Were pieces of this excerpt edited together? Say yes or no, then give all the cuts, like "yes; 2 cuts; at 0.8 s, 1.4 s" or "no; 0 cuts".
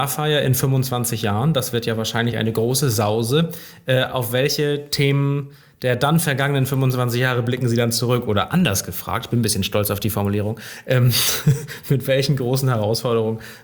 no; 0 cuts